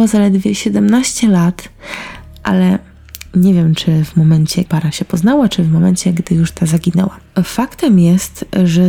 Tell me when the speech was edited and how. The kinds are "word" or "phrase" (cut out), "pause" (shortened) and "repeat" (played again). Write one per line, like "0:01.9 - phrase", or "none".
0:04.7 - word